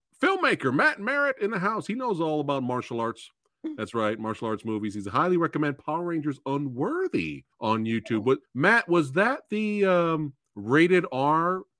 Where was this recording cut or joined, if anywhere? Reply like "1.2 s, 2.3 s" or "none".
7.5 s, 8.5 s